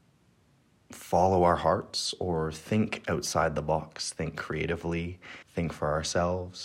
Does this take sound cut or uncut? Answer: cut